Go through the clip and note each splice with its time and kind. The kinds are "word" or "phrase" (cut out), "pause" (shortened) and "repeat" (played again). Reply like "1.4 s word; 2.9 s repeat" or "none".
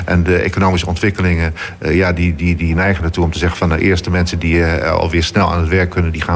none